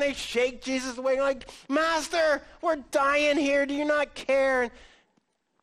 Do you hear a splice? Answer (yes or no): no